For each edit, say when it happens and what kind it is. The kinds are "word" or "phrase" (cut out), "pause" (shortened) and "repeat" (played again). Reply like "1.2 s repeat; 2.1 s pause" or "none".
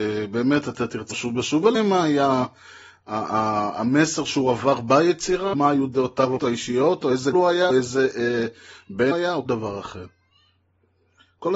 1.1 s word; 1.7 s word; 5.5 s word; 6.4 s word; 7.3 s word; 7.7 s word; 9.1 s word; 9.5 s word

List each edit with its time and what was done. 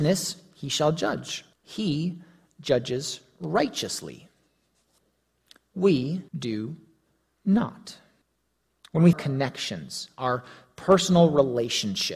1.5 s pause; 6.3 s pause; 8.2 s pause; 9.1 s phrase

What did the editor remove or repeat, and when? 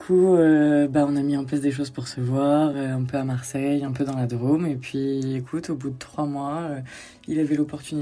none

